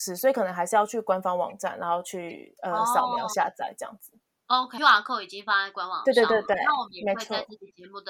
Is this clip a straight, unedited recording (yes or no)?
no